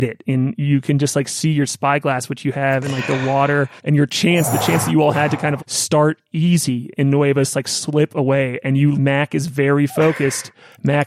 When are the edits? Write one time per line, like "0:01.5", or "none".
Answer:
0:03.8
0:05.6
0:08.9